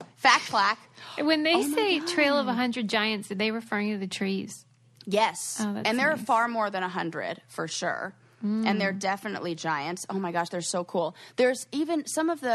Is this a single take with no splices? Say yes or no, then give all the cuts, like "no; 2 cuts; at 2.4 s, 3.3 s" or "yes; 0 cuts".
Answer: yes; 0 cuts